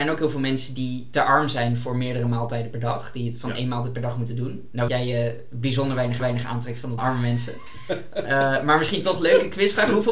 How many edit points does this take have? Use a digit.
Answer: 3